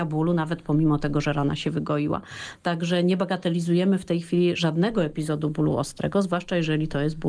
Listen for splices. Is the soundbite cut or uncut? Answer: uncut